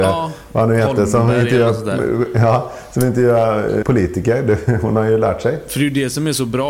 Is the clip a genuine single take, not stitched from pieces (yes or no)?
no